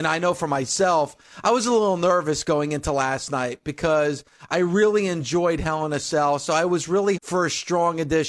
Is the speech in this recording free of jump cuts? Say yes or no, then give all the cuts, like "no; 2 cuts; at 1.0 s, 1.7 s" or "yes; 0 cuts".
no; 1 cut; at 7.2 s